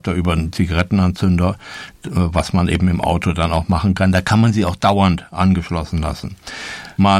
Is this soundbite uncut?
yes; 0 cuts

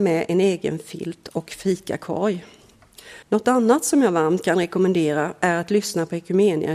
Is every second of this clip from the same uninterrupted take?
no; 1 cut; at 3.2 s

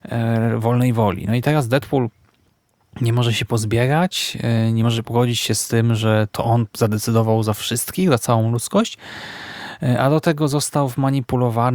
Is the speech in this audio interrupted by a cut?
no; 0 cuts

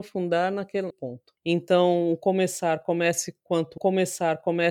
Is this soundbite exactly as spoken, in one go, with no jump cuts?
no; 2 cuts; at 0.9 s, 3.8 s

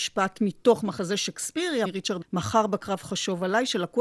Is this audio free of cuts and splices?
no; 2 cuts; at 1.8 s, 2.2 s

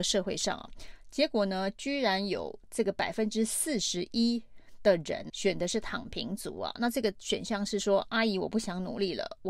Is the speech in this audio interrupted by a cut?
yes; 1 cut; at 5.3 s

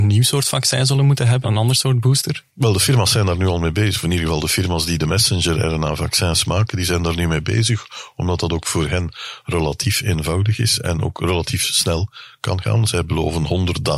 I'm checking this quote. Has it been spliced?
yes; 1 cut; at 1.4 s

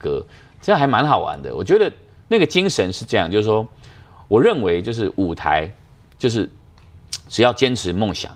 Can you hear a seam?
no; 0 cuts

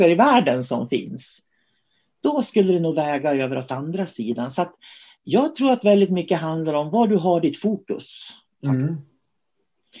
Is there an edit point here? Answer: no; 0 cuts

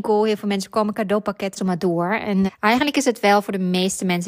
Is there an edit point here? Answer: yes; 2 cuts; at 1.6 s, 2.5 s

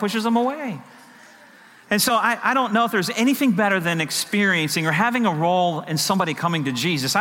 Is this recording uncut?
yes; 0 cuts

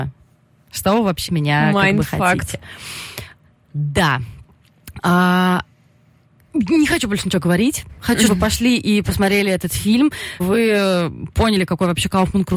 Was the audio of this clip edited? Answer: yes; 3 cuts; at 1.3 s, 8.3 s, 10.4 s

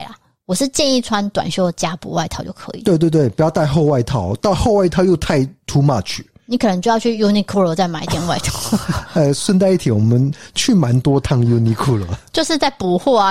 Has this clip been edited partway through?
no; 0 cuts

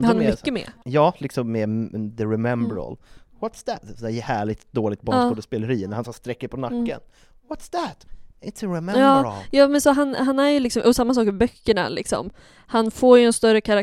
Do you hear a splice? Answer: no; 0 cuts

